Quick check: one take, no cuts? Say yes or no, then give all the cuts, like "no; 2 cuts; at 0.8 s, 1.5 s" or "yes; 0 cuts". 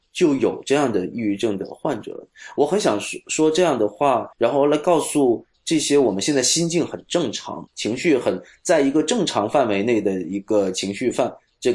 no; 2 cuts; at 4.3 s, 7.7 s